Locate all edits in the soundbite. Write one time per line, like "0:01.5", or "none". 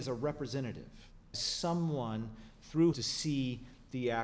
0:01.3
0:02.9